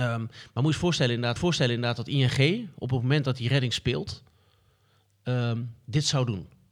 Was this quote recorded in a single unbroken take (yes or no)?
no